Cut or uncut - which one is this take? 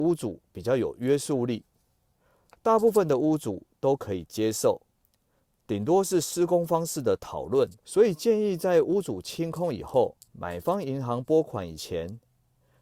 cut